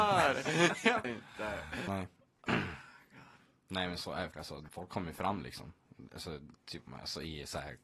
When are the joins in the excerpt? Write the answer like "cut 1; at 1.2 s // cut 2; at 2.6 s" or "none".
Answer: cut 1; at 1.0 s // cut 2; at 1.9 s // cut 3; at 4.3 s // cut 4; at 4.7 s // cut 5; at 6.9 s